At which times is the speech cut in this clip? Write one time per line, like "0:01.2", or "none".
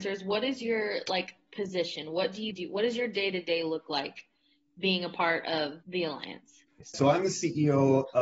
0:02.5